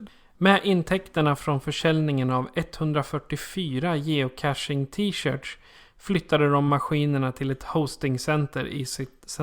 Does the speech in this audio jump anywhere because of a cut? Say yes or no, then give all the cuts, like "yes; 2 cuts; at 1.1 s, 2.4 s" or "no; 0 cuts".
no; 0 cuts